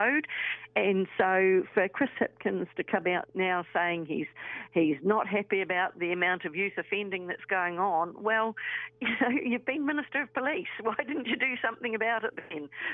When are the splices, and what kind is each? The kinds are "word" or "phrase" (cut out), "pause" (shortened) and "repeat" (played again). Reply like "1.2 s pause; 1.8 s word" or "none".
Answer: none

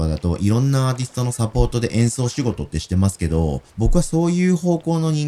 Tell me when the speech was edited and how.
3.7 s pause

